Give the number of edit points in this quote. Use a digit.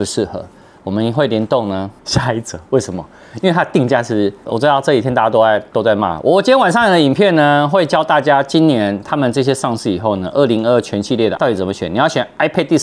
1